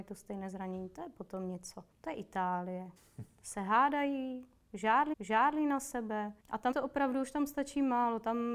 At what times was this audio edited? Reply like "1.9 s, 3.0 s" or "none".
1.9 s, 3.0 s, 5.1 s, 6.4 s, 6.7 s